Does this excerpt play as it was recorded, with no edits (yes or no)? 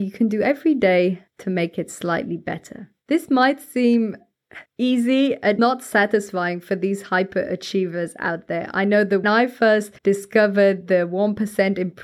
no